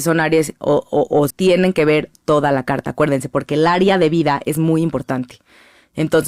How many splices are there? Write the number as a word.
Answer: one